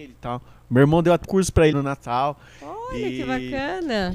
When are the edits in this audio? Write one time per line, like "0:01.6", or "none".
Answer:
0:01.2
0:01.7